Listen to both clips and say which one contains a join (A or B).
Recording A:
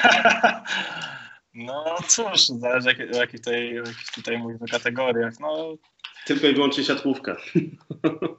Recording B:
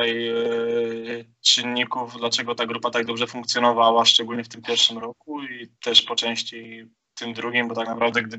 B